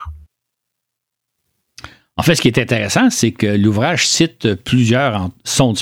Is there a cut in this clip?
no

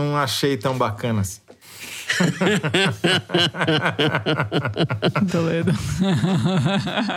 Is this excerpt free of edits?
no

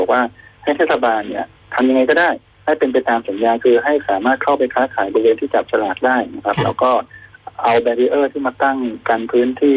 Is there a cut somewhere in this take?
yes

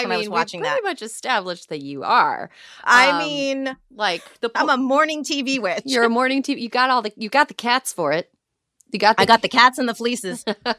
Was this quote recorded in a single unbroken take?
yes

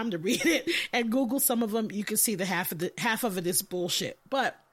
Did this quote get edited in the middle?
no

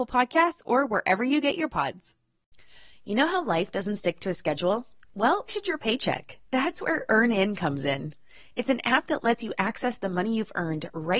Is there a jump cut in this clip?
yes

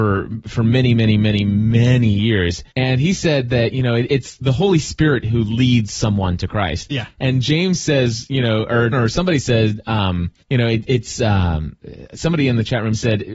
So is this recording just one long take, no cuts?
no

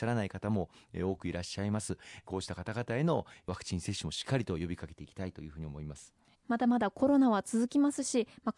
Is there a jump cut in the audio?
yes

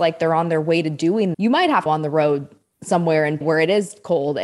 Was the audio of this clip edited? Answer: yes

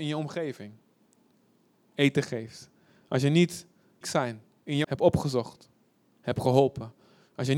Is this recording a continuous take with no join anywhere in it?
no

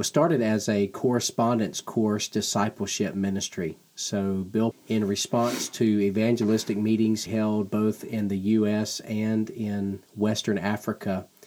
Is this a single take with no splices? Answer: no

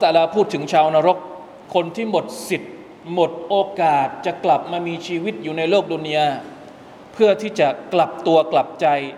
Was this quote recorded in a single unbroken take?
no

